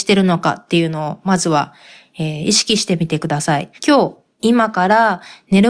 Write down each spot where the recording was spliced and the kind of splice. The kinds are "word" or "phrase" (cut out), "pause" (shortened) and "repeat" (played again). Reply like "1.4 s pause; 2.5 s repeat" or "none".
3.8 s pause